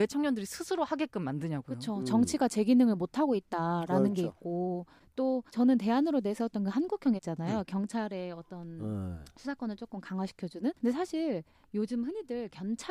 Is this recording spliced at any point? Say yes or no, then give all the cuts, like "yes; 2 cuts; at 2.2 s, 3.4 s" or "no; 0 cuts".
yes; 3 cuts; at 5.5 s, 7.2 s, 10.8 s